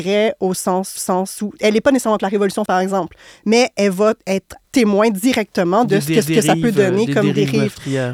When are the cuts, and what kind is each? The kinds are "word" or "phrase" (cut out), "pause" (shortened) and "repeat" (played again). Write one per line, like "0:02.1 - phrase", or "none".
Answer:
0:01.0 - repeat
0:02.2 - word
0:02.7 - word
0:04.6 - pause
0:06.2 - repeat